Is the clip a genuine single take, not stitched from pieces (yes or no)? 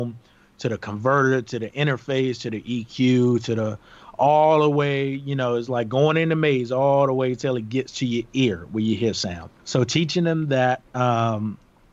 no